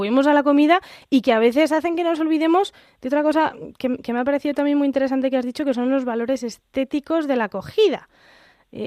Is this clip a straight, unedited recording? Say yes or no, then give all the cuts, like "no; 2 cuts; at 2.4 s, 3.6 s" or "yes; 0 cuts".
yes; 0 cuts